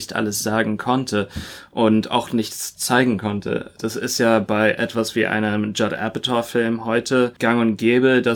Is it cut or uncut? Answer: uncut